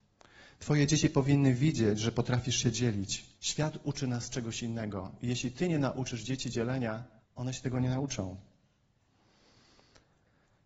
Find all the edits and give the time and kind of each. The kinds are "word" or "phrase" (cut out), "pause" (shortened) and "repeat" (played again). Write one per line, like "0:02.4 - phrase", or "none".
0:03.3 - pause
0:07.2 - pause